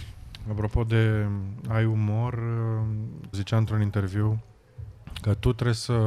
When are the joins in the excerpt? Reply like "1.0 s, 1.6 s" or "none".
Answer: 3.3 s